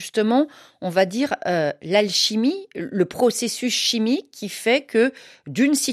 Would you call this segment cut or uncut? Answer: uncut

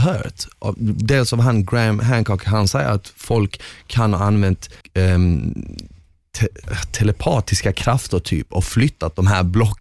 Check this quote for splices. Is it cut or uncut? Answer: cut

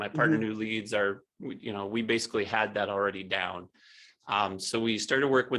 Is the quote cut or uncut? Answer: uncut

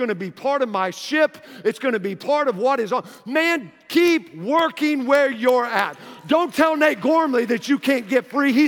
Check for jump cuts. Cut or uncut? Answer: uncut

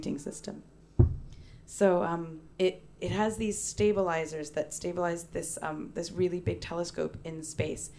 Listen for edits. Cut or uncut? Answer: cut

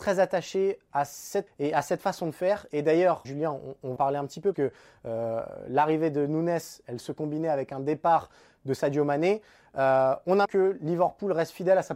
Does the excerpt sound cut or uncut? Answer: cut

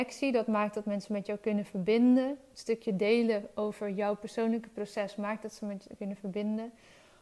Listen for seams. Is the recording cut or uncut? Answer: uncut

